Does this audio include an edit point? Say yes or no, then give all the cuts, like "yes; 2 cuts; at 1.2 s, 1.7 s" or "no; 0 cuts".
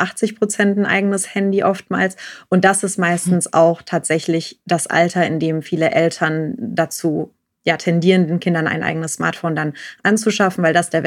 no; 0 cuts